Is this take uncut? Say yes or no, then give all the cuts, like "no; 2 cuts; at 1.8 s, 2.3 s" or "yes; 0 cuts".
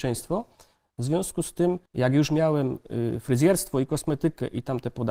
no; 1 cut; at 1.9 s